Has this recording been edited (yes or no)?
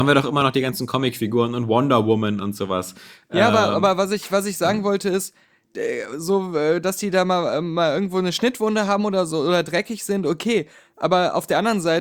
no